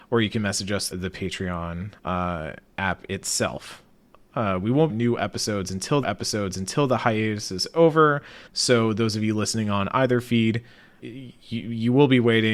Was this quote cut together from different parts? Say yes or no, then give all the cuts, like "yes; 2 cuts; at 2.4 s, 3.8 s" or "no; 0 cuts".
yes; 6 cuts; at 0.9 s, 2.0 s, 4.9 s, 6.0 s, 8.5 s, 11.0 s